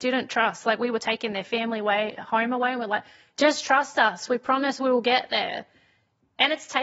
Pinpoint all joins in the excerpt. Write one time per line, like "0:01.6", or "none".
none